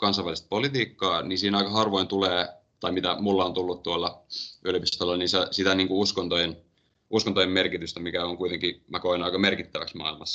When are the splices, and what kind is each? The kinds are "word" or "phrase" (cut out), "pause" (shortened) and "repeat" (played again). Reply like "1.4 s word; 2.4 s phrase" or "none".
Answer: none